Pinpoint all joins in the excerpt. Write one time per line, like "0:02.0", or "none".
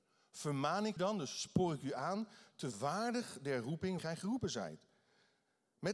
0:01.0
0:02.7
0:04.0